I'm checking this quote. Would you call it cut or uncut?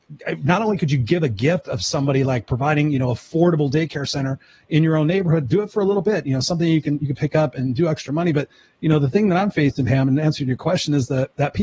uncut